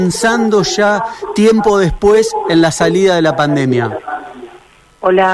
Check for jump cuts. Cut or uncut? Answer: uncut